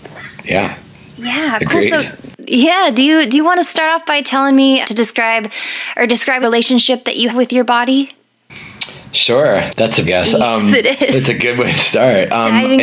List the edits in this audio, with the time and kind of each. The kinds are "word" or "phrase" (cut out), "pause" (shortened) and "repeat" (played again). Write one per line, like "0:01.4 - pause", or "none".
0:04.8 - word
0:06.4 - word
0:07.3 - word
0:09.7 - word
0:10.1 - phrase